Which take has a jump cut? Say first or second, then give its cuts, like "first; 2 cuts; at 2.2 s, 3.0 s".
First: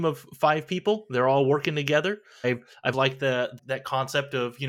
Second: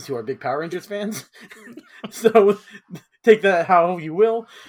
first; 3 cuts; at 2.4 s, 2.9 s, 3.6 s